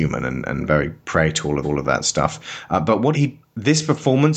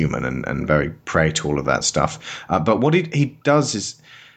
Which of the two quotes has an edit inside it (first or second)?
first